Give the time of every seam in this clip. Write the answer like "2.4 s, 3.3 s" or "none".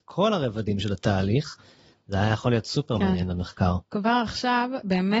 none